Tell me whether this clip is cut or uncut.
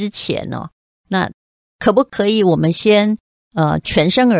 uncut